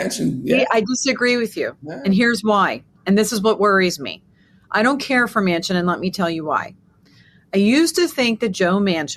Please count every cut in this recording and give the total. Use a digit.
0